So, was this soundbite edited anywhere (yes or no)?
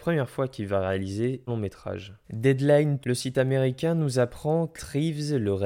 yes